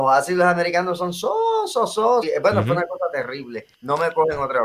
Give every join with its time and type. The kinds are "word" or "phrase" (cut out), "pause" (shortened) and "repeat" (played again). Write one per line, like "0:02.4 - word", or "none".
0:02.2 - word
0:03.7 - pause